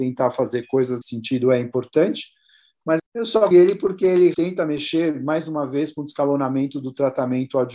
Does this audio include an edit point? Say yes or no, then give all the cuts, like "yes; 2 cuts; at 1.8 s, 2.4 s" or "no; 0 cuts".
yes; 4 cuts; at 1.0 s, 3.0 s, 3.5 s, 4.3 s